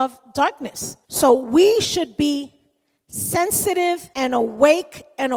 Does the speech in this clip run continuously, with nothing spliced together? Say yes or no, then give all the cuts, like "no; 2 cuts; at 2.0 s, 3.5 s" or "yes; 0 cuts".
no; 2 cuts; at 1.0 s, 4.1 s